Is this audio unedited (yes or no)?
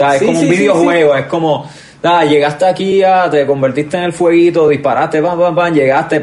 yes